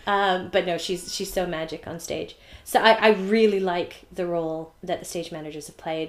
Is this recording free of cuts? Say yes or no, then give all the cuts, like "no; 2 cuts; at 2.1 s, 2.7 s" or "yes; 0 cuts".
no; 1 cut; at 4.8 s